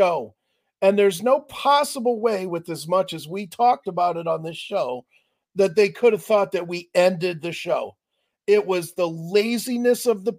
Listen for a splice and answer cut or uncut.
uncut